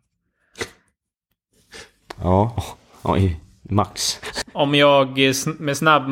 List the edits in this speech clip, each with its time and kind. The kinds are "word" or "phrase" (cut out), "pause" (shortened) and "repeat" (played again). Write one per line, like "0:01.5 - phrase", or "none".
0:02.6 - word
0:04.4 - word